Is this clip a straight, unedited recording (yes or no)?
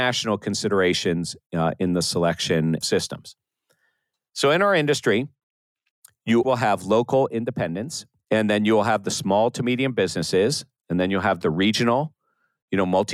no